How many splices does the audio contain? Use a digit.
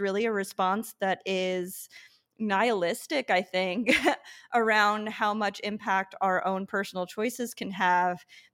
0